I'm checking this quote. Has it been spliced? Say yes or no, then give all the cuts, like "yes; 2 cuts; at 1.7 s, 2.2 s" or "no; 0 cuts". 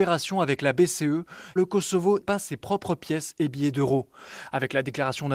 yes; 2 cuts; at 1.6 s, 2.2 s